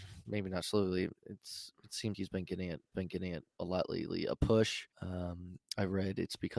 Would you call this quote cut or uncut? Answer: cut